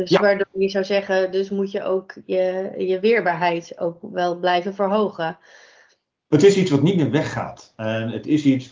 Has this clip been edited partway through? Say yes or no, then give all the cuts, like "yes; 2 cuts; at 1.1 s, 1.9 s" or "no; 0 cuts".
no; 0 cuts